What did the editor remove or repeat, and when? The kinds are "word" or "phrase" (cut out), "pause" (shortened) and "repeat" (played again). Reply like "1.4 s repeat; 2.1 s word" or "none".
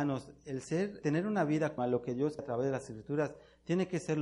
1.0 s word; 1.8 s word; 2.4 s word